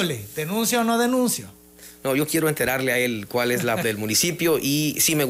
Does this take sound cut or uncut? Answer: cut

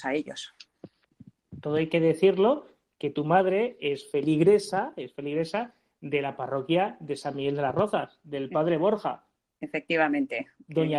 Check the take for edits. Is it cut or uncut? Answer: uncut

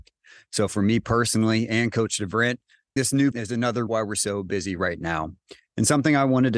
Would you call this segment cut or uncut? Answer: cut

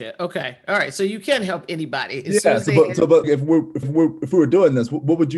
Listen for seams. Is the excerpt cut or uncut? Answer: cut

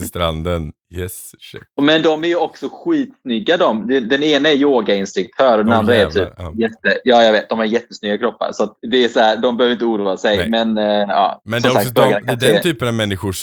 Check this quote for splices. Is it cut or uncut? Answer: cut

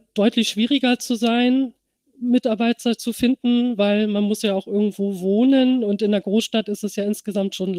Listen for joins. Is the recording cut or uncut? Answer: uncut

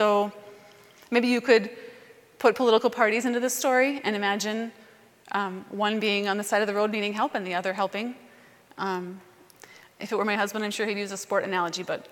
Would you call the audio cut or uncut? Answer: uncut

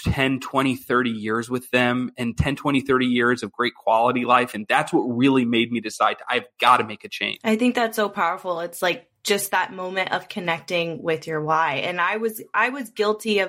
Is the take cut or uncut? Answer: uncut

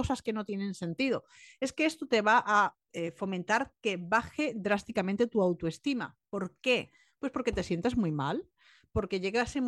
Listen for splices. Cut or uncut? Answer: uncut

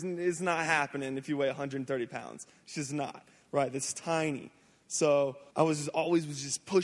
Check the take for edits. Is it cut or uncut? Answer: cut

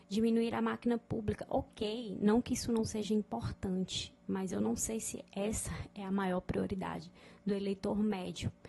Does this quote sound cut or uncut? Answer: uncut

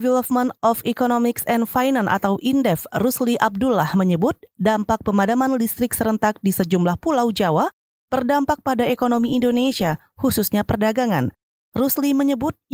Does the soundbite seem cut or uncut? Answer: uncut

